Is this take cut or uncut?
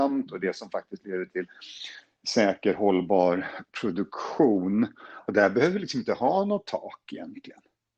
uncut